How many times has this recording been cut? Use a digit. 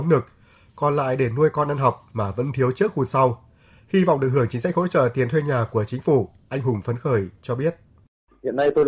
0